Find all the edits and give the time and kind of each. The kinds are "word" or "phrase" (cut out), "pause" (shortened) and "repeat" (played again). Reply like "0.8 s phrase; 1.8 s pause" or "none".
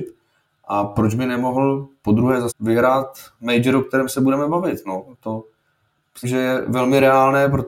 2.5 s word; 6.2 s word